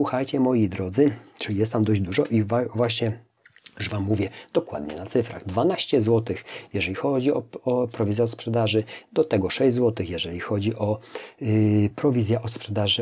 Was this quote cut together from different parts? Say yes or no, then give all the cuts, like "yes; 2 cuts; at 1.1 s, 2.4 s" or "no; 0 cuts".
no; 0 cuts